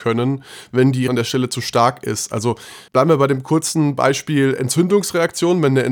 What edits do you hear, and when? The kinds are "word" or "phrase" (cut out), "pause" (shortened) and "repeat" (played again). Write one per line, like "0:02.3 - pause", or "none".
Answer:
0:01.1 - word
0:02.9 - pause